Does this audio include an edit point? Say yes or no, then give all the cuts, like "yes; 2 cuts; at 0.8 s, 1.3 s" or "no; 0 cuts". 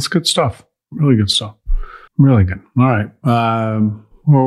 yes; 1 cut; at 2.1 s